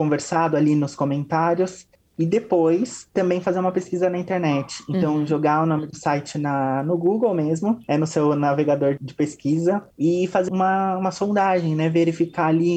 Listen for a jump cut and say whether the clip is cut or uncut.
cut